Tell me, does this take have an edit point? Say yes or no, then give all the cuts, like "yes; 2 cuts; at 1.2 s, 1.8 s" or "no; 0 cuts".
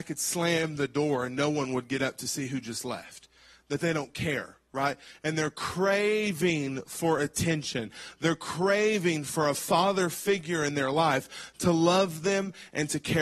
no; 0 cuts